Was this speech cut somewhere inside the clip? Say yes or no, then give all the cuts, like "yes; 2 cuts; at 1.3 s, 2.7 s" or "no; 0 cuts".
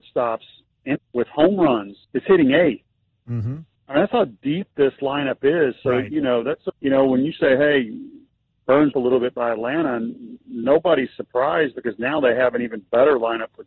yes; 5 cuts; at 0.9 s, 2.0 s, 3.1 s, 6.7 s, 8.9 s